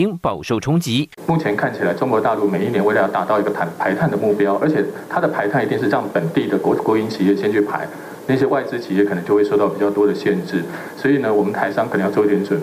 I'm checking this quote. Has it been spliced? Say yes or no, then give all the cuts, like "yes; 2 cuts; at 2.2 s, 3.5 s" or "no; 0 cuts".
no; 0 cuts